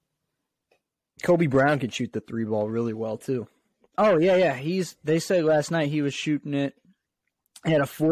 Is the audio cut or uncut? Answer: uncut